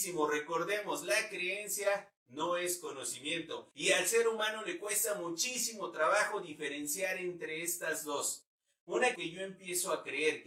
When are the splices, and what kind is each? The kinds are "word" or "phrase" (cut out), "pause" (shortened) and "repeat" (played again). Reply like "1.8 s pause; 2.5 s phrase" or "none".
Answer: 3.7 s pause; 9.2 s phrase